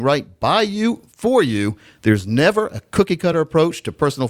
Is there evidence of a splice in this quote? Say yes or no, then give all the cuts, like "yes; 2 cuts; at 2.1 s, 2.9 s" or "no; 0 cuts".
no; 0 cuts